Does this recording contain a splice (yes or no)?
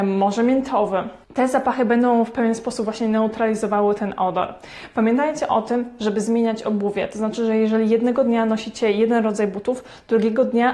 yes